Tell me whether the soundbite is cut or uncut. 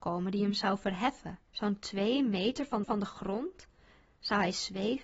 cut